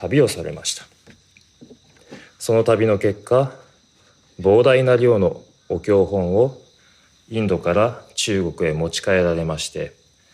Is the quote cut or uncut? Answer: uncut